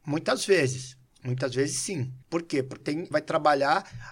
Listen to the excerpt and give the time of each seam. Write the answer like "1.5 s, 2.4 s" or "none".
1.1 s, 2.2 s, 2.8 s, 3.1 s